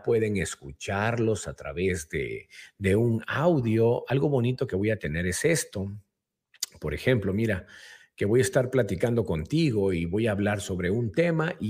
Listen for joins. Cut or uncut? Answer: uncut